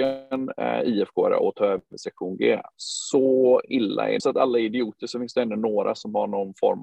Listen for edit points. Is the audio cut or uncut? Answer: cut